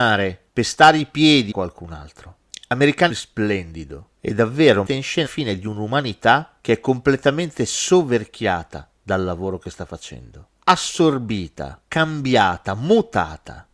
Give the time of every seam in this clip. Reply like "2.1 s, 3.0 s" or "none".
1.5 s, 3.1 s, 4.9 s, 5.3 s, 6.6 s, 9.0 s, 11.8 s